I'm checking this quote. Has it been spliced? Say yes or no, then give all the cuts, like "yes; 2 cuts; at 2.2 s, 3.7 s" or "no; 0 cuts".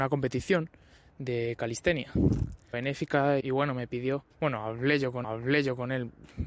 yes; 4 cuts; at 2.7 s, 3.4 s, 4.3 s, 5.2 s